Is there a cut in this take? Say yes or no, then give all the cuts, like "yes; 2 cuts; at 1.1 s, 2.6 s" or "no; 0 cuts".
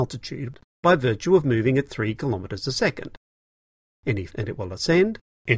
yes; 1 cut; at 4.3 s